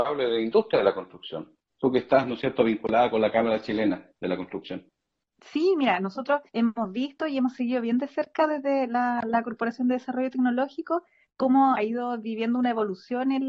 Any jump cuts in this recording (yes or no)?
yes